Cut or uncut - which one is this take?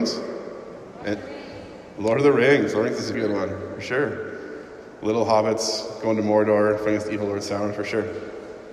cut